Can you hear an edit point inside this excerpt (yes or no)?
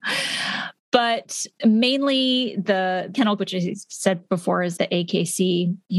yes